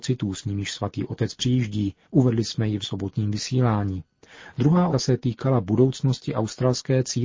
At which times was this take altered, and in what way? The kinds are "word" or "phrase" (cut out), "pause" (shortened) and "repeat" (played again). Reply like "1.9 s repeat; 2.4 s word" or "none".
2.0 s pause; 2.8 s word; 4.9 s word